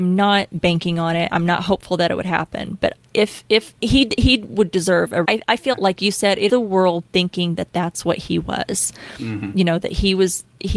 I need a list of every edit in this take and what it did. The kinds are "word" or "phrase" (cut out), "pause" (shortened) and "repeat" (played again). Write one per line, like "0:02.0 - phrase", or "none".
0:03.8 - pause
0:05.2 - phrase
0:05.7 - word
0:06.5 - phrase